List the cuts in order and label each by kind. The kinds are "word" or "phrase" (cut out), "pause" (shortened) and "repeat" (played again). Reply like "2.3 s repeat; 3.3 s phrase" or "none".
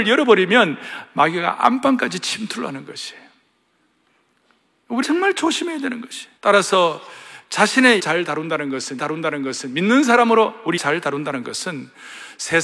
5.0 s word; 6.4 s pause; 8.0 s word; 9.0 s repeat; 10.8 s word

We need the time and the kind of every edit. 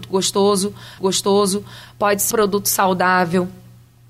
1.0 s repeat; 2.3 s word

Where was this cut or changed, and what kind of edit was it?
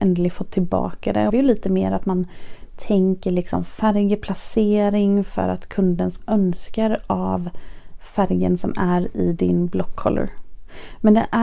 1.3 s phrase; 6.2 s phrase

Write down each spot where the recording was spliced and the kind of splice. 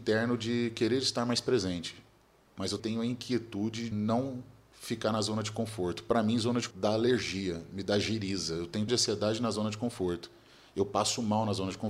2.8 s word; 3.9 s word; 6.7 s word; 8.9 s word

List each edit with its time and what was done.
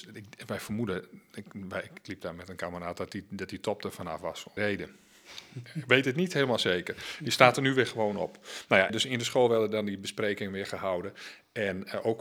4.6 s phrase; 8.9 s word

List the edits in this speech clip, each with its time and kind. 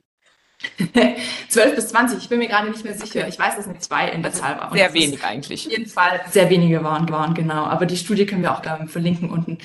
7.1 s repeat; 8.6 s word

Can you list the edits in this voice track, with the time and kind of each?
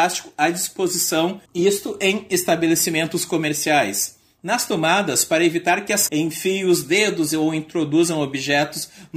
1.5 s pause; 4.2 s pause; 6.1 s word

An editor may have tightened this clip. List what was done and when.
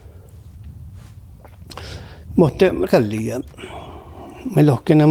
2.9 s word

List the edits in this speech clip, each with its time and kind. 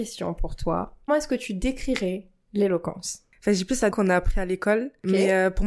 1.1 s word; 3.9 s word

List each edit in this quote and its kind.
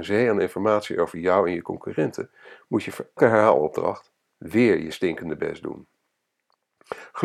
3.2 s word

